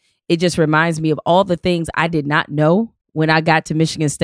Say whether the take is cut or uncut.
cut